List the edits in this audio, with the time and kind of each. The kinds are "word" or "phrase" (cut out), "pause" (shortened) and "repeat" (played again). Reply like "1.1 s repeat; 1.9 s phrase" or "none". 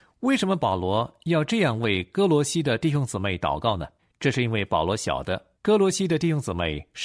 4.0 s pause; 5.6 s pause